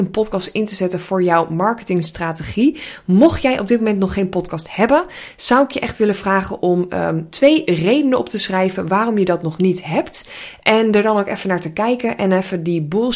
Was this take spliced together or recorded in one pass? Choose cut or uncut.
uncut